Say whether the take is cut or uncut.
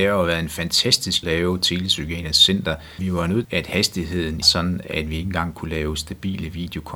cut